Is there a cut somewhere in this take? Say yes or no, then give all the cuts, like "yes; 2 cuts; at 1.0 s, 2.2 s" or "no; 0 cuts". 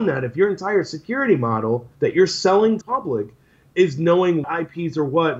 yes; 3 cuts; at 1.9 s, 2.8 s, 4.4 s